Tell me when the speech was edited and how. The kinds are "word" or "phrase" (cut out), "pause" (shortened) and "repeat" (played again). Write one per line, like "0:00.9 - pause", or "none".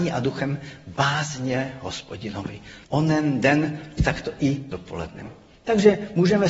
0:02.8 - pause
0:04.0 - phrase
0:04.7 - word